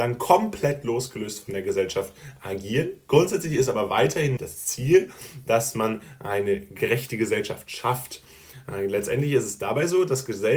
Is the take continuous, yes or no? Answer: no